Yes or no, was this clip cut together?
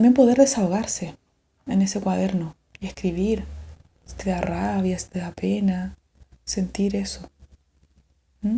no